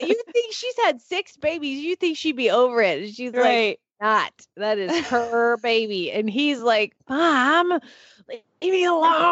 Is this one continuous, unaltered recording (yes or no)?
yes